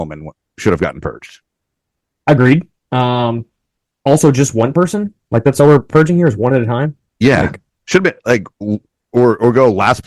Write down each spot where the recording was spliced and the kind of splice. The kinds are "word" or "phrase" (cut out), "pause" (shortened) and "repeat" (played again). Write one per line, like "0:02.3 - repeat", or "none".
none